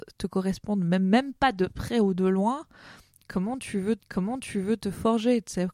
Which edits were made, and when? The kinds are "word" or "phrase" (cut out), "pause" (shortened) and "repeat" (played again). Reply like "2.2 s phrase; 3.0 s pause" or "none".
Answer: 4.0 s repeat